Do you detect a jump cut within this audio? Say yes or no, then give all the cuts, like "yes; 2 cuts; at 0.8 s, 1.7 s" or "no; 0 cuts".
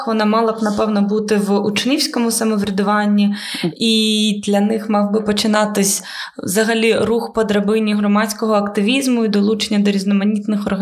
no; 0 cuts